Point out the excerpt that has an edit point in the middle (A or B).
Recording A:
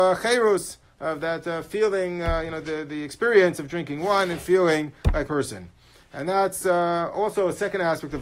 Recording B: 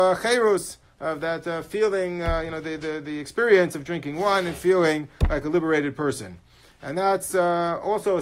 A